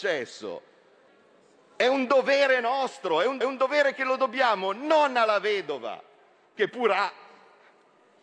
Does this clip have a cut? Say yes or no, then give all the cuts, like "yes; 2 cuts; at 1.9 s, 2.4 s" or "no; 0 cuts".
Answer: yes; 2 cuts; at 1.1 s, 3.4 s